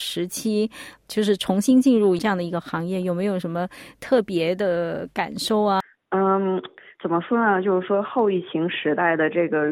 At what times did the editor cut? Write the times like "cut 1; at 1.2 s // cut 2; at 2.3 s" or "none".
none